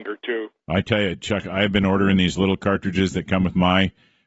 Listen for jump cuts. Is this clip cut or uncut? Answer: uncut